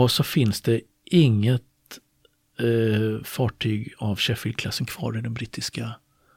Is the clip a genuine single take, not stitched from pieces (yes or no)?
yes